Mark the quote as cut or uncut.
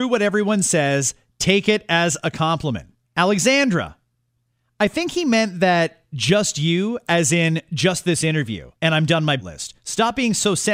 cut